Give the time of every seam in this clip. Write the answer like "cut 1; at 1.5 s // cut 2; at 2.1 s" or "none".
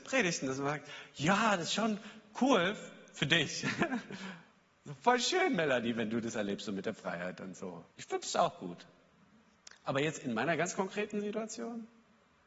cut 1; at 7.9 s

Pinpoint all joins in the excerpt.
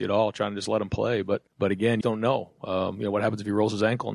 cut 1; at 1.5 s // cut 2; at 2.0 s

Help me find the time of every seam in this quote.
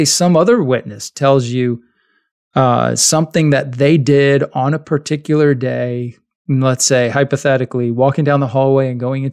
none

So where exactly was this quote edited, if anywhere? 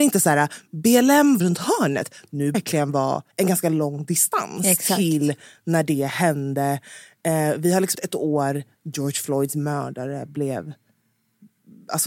cut 1; at 1.4 s // cut 2; at 2.5 s // cut 3; at 3.3 s // cut 4; at 7.9 s // cut 5; at 8.7 s

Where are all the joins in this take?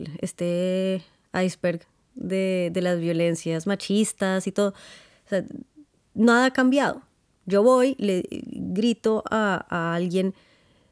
none

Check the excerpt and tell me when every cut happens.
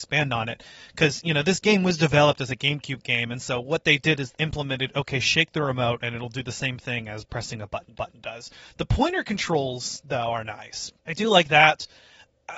cut 1; at 4.3 s // cut 2; at 7.9 s // cut 3; at 11.0 s

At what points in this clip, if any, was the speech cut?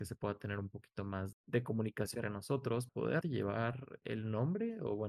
cut 1; at 1.3 s // cut 2; at 2.2 s // cut 3; at 2.9 s // cut 4; at 3.2 s // cut 5; at 4.0 s

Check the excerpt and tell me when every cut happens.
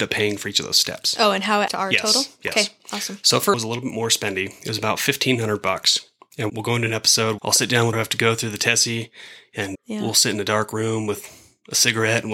cut 1; at 1.7 s // cut 2; at 3.5 s // cut 3; at 6.5 s // cut 4; at 7.4 s // cut 5; at 7.9 s // cut 6; at 9.7 s

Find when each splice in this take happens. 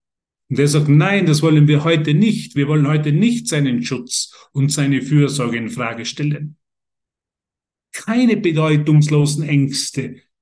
none

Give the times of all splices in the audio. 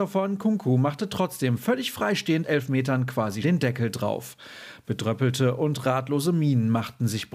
cut 1; at 2.4 s // cut 2; at 3.4 s

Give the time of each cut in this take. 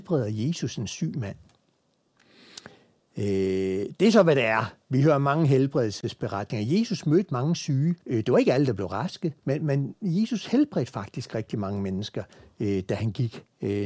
cut 1; at 8.0 s // cut 2; at 9.4 s

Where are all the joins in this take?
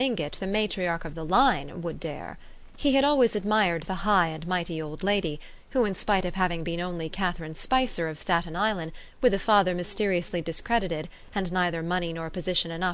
none

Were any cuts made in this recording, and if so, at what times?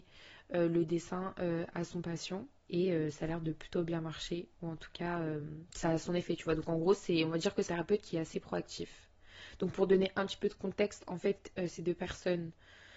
cut 1; at 2.6 s // cut 2; at 5.7 s // cut 3; at 7.7 s

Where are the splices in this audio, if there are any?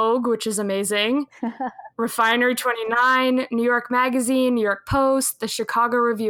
none

